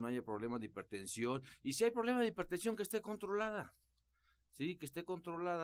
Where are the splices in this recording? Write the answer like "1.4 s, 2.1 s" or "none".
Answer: none